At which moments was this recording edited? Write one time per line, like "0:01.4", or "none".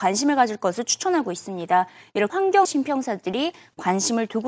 0:02.3
0:02.6

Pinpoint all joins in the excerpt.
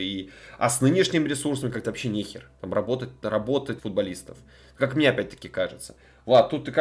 0:01.8
0:03.8

